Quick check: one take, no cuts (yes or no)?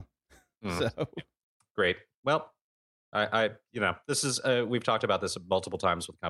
yes